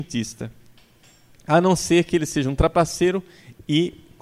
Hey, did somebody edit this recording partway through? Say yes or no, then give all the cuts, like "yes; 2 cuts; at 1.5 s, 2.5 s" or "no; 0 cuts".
no; 0 cuts